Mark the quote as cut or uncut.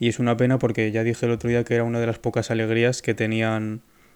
uncut